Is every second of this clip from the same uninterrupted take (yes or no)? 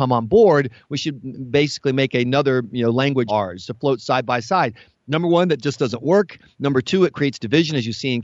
no